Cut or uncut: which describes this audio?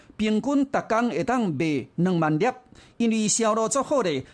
uncut